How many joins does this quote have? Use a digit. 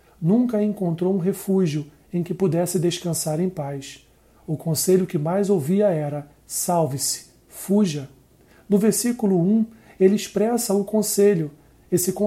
0